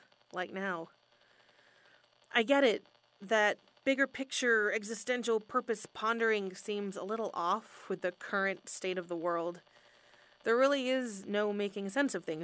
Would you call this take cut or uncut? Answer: uncut